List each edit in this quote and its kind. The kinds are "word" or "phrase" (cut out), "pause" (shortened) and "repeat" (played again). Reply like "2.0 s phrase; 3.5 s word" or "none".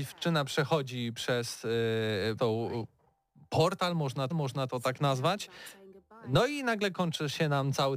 2.4 s word; 4.3 s repeat